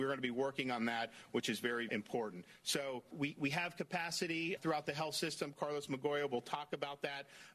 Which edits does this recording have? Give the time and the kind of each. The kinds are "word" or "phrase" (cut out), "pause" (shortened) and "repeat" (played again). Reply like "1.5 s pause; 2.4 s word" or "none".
1.9 s phrase; 3.1 s word; 4.6 s word